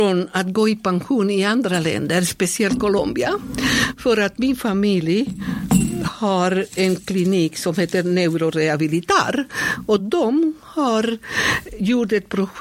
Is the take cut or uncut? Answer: uncut